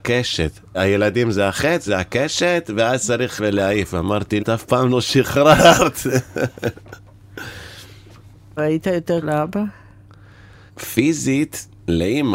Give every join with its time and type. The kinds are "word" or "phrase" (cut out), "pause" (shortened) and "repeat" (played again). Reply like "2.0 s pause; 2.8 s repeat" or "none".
1.9 s word; 3.4 s word; 4.4 s word; 8.6 s word; 9.2 s word